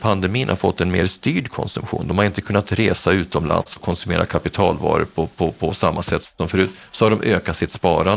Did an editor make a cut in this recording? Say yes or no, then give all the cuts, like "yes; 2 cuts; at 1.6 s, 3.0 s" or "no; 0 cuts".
no; 0 cuts